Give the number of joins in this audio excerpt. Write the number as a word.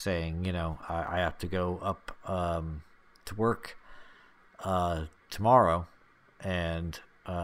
zero